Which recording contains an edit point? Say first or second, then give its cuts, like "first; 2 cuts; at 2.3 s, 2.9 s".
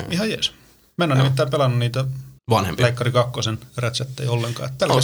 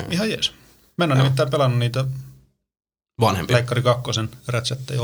first; 1 cut; at 2.4 s